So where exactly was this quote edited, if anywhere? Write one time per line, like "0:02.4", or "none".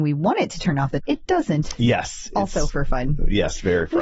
0:01.0